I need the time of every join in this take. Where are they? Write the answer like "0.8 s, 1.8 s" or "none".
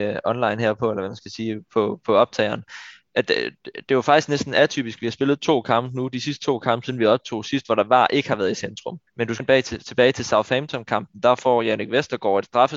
9.1 s, 9.4 s